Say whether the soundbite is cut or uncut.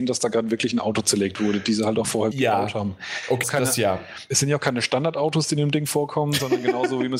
cut